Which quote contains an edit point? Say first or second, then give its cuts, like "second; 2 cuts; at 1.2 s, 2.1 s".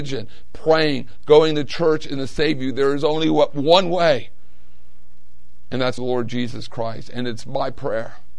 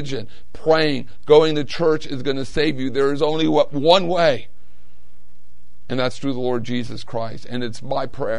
first; 2 cuts; at 2.2 s, 6.0 s